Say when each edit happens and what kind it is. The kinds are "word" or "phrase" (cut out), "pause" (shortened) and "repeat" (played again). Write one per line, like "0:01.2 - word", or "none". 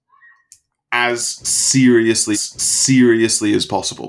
0:02.3 - repeat